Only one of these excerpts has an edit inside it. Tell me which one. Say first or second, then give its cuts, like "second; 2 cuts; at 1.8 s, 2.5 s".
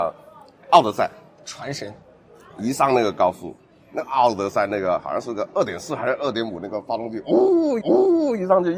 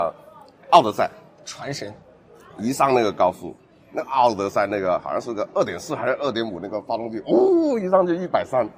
first; 1 cut; at 7.8 s